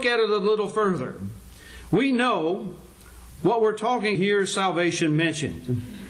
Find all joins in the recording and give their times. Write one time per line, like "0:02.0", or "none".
0:04.2